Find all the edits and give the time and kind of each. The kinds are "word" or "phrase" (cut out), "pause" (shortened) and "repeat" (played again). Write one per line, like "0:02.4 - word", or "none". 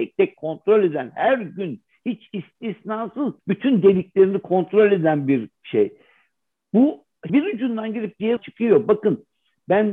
0:03.4 - pause
0:05.5 - pause
0:07.3 - word
0:08.4 - word

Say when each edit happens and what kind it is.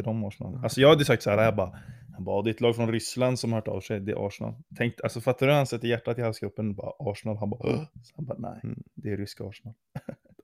0:07.9 - pause

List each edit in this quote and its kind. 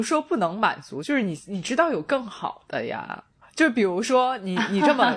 0:03.4 - pause

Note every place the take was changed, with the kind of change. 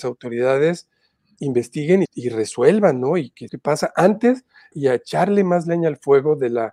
0:02.1 - word
0:03.5 - word
0:04.7 - phrase

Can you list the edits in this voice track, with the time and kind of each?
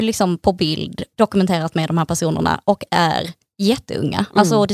0:01.1 - pause

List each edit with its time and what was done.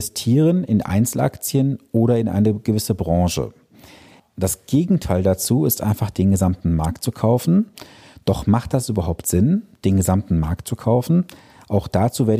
none

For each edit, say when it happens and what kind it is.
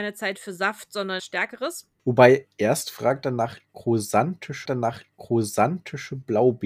0:01.2 - phrase
0:02.5 - pause
0:04.7 - repeat

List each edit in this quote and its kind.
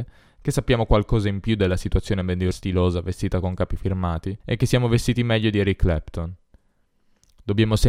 0:02.5 - phrase
0:04.4 - pause

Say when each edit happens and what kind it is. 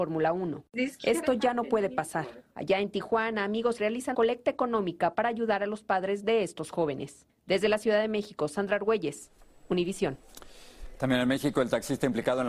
0:02.5 - pause
0:03.8 - phrase
0:04.1 - word

